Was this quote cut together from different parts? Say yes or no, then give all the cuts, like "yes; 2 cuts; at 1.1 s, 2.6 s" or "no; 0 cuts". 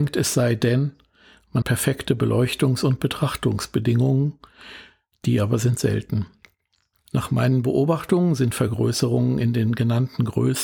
yes; 1 cut; at 1.6 s